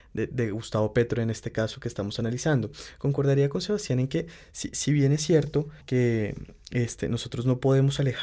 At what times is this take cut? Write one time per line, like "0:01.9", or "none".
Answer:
0:05.8